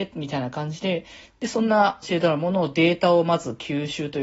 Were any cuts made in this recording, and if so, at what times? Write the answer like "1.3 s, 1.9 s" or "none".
2.0 s